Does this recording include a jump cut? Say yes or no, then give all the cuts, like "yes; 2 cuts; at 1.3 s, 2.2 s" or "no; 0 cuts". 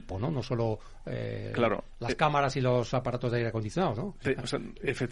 no; 0 cuts